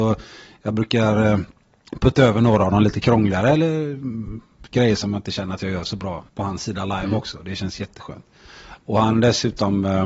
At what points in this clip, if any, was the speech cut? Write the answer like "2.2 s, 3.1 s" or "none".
6.3 s